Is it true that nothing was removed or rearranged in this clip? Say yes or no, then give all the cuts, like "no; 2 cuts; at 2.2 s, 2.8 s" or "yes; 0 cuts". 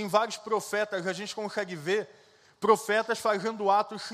yes; 0 cuts